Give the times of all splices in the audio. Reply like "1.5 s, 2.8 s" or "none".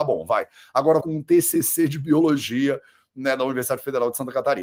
1.0 s